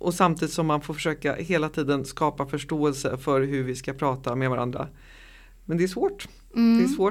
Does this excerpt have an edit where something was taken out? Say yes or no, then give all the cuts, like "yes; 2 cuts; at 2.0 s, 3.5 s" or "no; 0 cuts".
no; 0 cuts